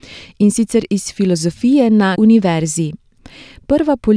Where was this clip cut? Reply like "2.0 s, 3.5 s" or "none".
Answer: 2.1 s